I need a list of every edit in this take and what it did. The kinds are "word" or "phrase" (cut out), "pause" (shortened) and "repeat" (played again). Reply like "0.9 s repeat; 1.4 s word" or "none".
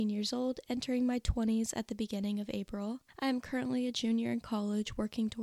3.1 s pause